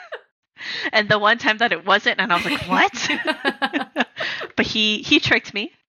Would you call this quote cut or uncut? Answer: uncut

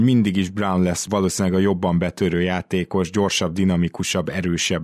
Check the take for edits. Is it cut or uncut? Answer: cut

